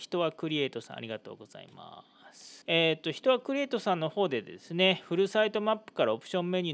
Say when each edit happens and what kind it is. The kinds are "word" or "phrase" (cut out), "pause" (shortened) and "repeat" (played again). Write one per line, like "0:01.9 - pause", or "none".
0:02.6 - pause